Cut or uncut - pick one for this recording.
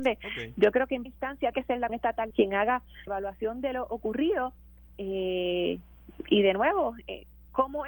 cut